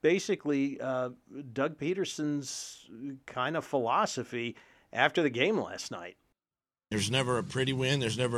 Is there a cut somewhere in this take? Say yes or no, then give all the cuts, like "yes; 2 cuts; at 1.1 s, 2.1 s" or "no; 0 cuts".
no; 0 cuts